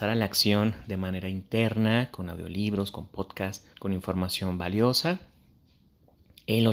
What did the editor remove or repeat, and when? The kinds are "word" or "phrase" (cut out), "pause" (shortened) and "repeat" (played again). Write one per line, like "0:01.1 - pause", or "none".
0:03.7 - pause